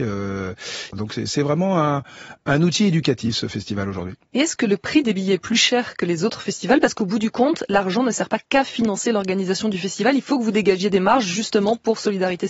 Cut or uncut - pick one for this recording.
uncut